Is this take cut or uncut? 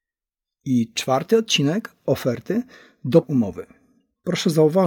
cut